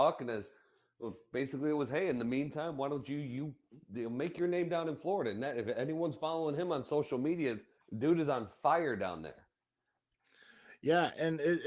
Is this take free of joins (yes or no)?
no